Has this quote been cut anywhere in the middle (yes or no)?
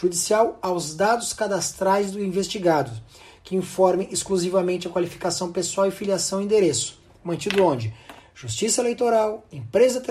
no